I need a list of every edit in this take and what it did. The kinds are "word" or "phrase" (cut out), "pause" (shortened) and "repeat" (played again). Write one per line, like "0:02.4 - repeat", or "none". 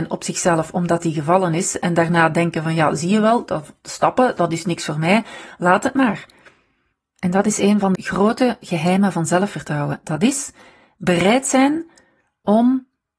0:07.9 - word